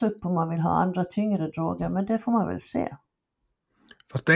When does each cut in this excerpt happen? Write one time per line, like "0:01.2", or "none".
none